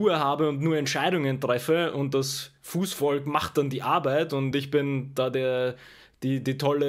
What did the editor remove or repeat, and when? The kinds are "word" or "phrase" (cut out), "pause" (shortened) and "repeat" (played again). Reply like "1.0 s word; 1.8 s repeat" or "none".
none